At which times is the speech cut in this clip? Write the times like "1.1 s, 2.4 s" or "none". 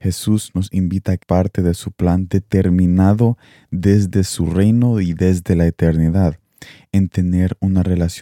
1.2 s